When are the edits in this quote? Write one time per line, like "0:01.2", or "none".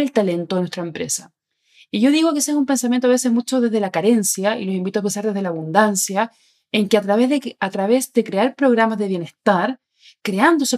none